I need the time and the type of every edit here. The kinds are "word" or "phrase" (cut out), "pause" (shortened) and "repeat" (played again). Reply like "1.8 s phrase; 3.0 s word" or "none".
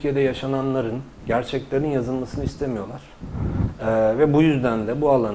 none